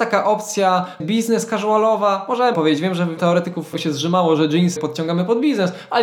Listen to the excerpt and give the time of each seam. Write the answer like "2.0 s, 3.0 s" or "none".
1.0 s, 2.5 s, 3.2 s, 3.7 s, 4.8 s